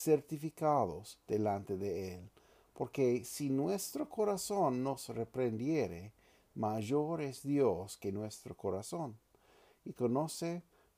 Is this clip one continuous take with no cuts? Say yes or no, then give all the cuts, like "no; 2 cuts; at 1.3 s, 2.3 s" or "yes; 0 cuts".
yes; 0 cuts